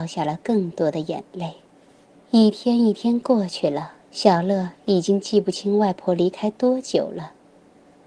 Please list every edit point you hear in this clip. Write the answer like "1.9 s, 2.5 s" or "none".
2.1 s, 4.0 s

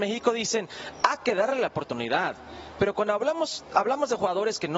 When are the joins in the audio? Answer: none

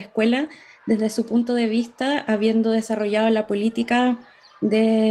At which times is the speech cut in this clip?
none

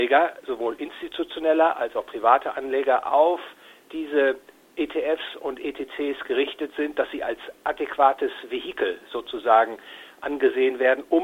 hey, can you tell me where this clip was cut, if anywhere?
none

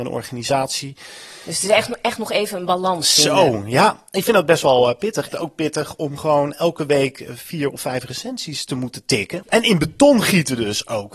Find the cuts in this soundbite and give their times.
5.3 s, 9.5 s

